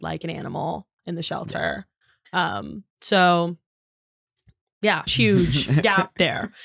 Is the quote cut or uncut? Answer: cut